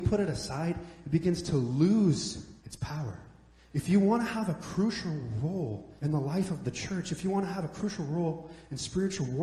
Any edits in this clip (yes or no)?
yes